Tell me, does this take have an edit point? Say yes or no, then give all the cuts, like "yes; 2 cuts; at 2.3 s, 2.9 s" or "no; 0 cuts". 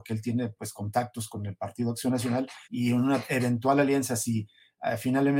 yes; 1 cut; at 2.6 s